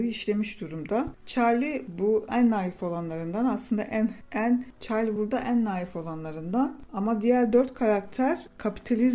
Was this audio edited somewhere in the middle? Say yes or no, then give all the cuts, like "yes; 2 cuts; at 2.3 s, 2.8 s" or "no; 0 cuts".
no; 0 cuts